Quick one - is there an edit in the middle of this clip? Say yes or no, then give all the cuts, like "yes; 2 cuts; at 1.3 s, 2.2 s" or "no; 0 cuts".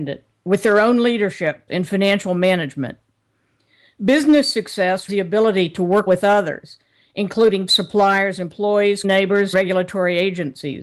yes; 6 cuts; at 1.7 s, 5.1 s, 6.1 s, 7.7 s, 9.0 s, 9.5 s